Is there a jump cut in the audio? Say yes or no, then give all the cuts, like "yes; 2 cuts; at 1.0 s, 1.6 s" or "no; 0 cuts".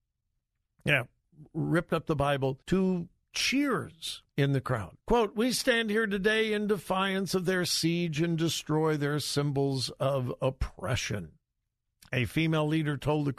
yes; 3 cuts; at 2.6 s, 4.3 s, 5.0 s